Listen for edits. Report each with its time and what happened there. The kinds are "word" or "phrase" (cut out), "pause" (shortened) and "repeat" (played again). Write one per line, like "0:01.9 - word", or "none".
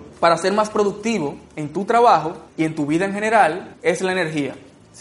none